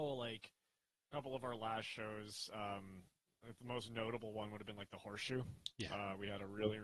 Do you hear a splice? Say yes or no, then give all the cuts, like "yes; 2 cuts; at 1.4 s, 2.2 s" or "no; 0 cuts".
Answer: no; 0 cuts